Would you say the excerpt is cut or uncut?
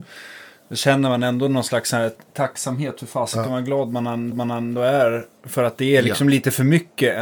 cut